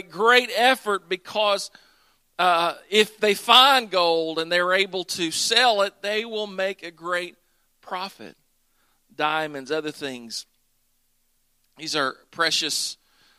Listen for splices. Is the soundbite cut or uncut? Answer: uncut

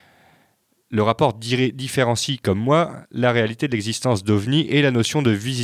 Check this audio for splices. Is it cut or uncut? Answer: uncut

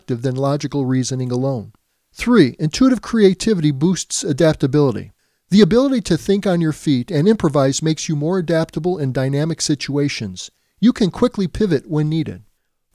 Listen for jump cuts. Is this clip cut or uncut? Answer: uncut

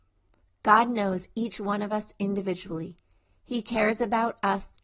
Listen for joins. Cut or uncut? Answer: uncut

